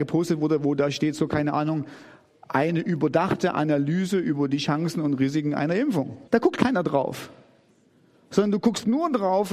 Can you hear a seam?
yes; 1 cut; at 6.3 s

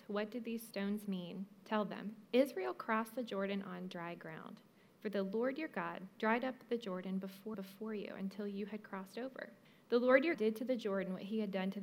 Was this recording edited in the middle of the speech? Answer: yes; 4 cuts; at 2.2 s, 7.5 s, 9.6 s, 10.3 s

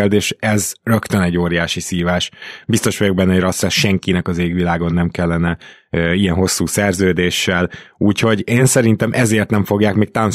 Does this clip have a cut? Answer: no; 0 cuts

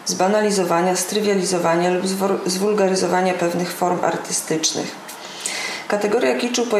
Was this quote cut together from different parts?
no; 0 cuts

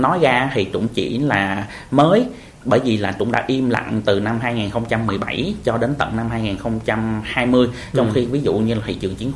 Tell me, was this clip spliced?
no; 0 cuts

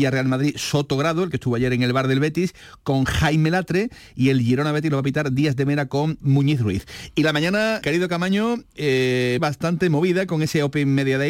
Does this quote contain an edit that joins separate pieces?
yes; 3 cuts; at 6.2 s, 7.8 s, 9.4 s

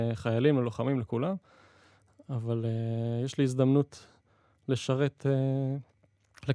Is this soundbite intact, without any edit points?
yes; 0 cuts

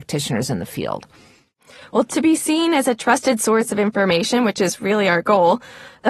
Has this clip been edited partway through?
no; 0 cuts

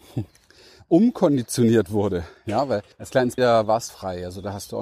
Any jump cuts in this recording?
yes; 3 cuts; at 2.9 s, 3.4 s, 3.9 s

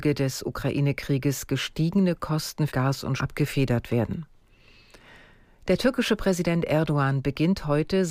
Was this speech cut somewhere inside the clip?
yes; 2 cuts; at 2.7 s, 3.2 s

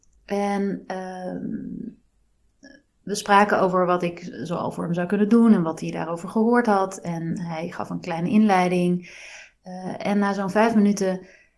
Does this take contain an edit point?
no; 0 cuts

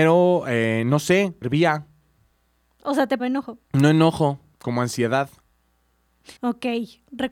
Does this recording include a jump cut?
yes; 4 cuts; at 1.4 s, 3.2 s, 3.6 s, 6.4 s

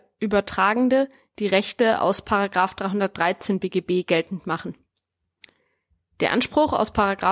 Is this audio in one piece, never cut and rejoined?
yes; 0 cuts

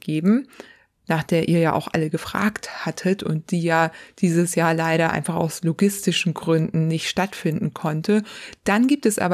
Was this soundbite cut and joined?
no; 0 cuts

